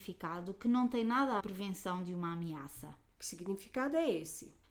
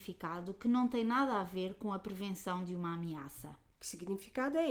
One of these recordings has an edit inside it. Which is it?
first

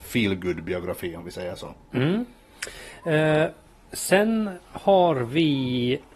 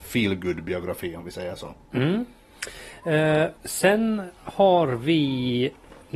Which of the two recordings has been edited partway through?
second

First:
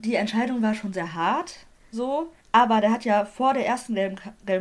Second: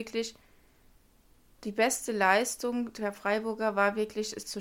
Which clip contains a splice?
first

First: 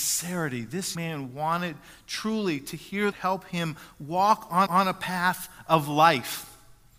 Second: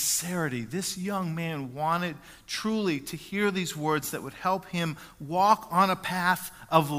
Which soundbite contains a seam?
first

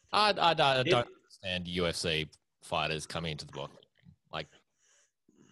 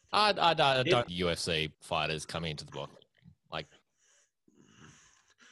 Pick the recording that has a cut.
second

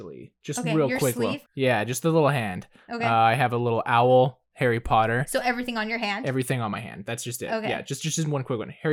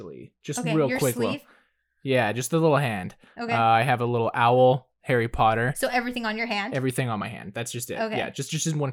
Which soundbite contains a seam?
first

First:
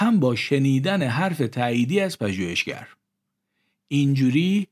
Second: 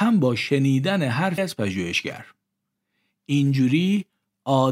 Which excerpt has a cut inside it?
second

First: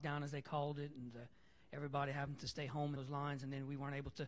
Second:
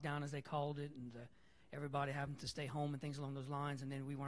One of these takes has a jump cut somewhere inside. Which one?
first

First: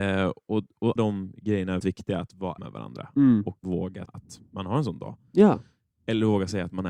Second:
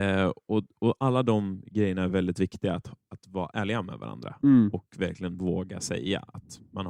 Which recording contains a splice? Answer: first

